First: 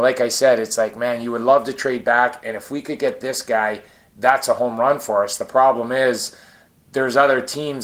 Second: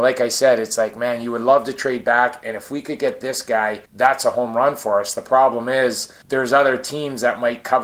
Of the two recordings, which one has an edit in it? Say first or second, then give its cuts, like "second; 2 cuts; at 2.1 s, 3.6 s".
second; 2 cuts; at 3.9 s, 6.2 s